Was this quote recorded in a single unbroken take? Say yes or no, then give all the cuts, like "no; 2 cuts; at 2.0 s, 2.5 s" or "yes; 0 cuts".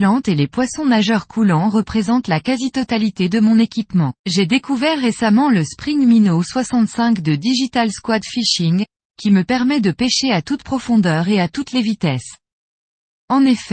no; 1 cut; at 4.2 s